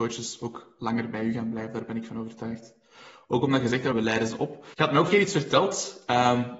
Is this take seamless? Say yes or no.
no